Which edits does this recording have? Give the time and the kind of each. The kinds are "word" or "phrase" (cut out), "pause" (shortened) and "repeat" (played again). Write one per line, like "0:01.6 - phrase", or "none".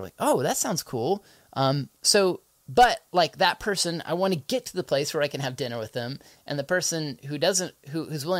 none